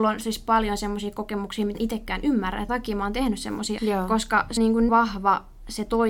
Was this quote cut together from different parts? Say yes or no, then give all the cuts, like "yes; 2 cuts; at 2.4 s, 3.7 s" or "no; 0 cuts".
yes; 5 cuts; at 1.7 s, 2.7 s, 3.8 s, 4.6 s, 4.9 s